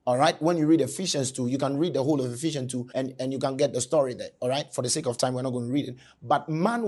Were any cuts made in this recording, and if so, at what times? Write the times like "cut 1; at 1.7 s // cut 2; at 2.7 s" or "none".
cut 1; at 2.9 s